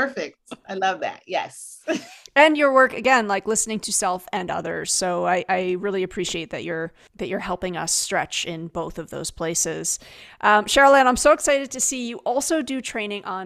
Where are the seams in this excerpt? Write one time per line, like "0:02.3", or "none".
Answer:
0:07.1